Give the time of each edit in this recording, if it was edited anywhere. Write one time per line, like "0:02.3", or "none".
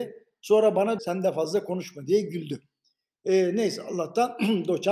0:01.0